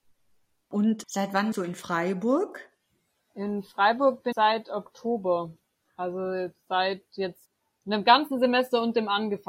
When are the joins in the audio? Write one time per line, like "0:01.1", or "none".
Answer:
0:01.5
0:04.3